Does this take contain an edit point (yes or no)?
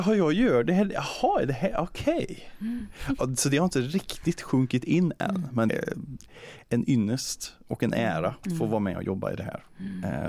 yes